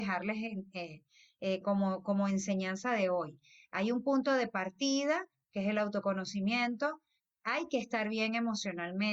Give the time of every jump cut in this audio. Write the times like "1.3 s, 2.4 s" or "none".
none